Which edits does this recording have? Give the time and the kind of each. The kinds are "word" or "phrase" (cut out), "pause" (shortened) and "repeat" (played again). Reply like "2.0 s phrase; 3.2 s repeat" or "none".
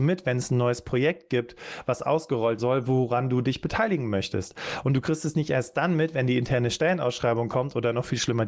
2.6 s word